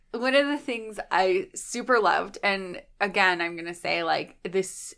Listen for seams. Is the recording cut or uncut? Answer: uncut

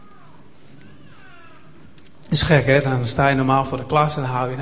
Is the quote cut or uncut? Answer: uncut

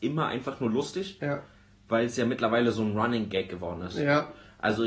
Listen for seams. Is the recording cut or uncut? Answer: uncut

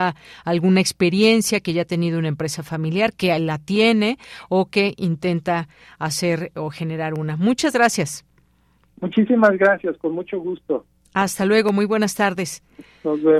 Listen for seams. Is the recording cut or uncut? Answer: uncut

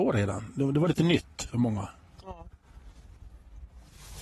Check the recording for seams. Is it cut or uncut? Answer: uncut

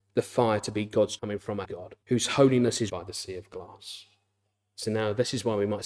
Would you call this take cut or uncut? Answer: cut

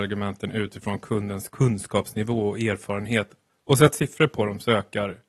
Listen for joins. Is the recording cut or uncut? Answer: uncut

